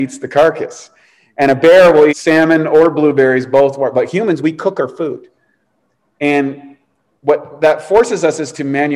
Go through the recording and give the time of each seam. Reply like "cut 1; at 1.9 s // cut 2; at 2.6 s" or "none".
cut 1; at 2.1 s